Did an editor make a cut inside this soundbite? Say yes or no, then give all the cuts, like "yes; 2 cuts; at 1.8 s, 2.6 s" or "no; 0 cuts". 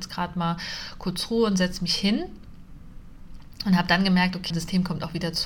yes; 1 cut; at 4.5 s